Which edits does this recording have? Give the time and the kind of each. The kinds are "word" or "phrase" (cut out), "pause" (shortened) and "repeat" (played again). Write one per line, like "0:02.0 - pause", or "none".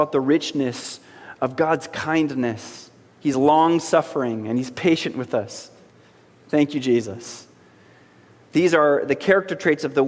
none